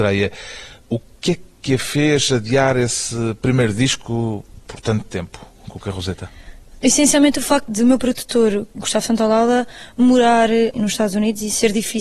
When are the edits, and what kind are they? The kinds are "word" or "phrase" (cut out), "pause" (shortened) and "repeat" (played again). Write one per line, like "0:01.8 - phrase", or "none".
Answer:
none

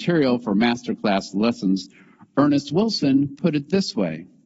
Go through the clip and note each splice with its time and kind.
none

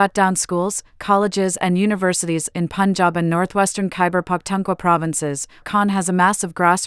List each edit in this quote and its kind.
0:05.6 - word

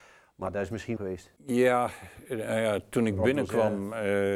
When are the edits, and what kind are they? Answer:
0:01.0 - phrase
0:01.4 - pause

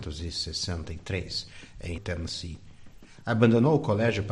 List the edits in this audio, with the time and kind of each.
0:02.0 - word

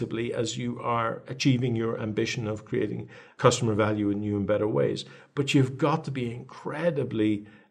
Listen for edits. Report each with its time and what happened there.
none

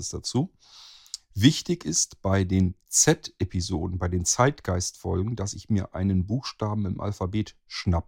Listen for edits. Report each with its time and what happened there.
none

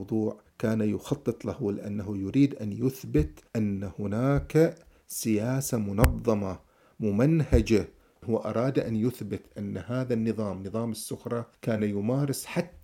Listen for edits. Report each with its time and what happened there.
none

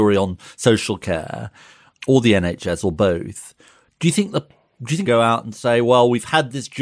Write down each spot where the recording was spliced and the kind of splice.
0:02.0 - word
0:05.0 - phrase

